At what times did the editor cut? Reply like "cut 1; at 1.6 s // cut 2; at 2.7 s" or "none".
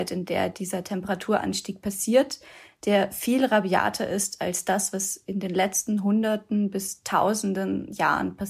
none